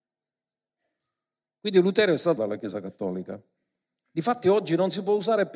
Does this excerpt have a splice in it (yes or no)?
yes